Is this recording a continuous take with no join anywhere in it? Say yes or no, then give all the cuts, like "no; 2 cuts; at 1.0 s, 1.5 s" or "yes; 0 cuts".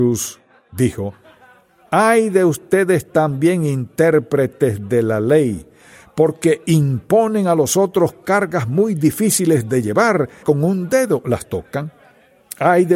no; 1 cut; at 10.4 s